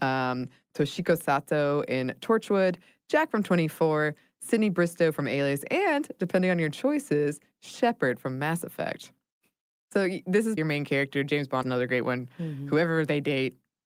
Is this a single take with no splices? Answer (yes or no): no